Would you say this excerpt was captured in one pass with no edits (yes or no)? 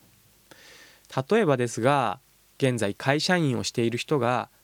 yes